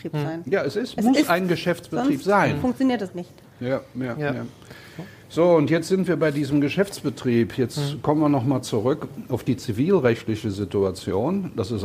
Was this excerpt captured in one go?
no; 1 cut; at 3.1 s

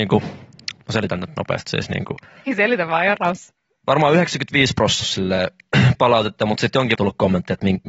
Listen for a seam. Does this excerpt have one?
yes; 5 cuts; at 1.6 s, 3.6 s, 5.0 s, 5.9 s, 7.0 s

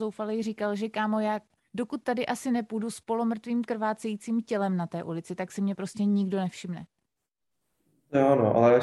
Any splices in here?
no; 0 cuts

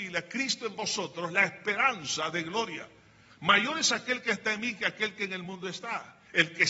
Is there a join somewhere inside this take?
no; 0 cuts

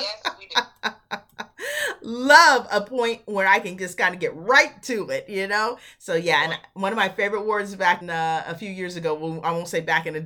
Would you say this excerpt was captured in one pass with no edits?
no; 1 cut; at 8.0 s

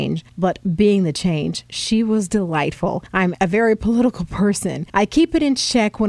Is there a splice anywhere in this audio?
yes; 1 cut; at 3.3 s

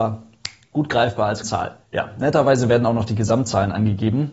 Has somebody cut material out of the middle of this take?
yes; 2 cuts; at 1.4 s, 1.8 s

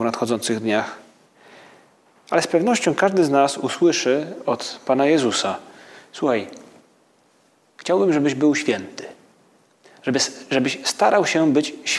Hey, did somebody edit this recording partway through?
no; 0 cuts

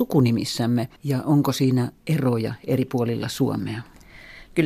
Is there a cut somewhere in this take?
yes; 1 cut; at 1.0 s

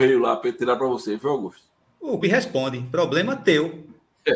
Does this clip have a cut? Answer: yes; 1 cut; at 2.2 s

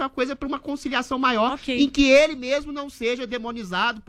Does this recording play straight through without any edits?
yes; 0 cuts

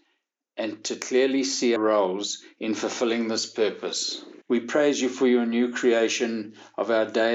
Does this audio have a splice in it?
yes; 2 cuts; at 1.8 s, 4.4 s

